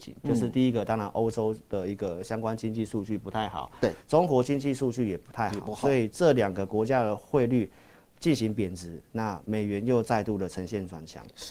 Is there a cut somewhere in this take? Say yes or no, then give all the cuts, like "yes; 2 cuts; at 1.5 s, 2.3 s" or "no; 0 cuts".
no; 0 cuts